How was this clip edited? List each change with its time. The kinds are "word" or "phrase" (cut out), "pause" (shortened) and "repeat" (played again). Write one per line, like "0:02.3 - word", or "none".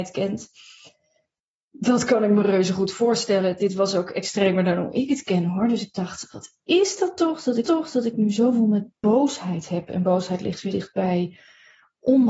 0:07.6 - repeat
0:10.7 - word